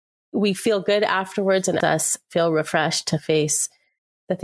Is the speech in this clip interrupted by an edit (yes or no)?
yes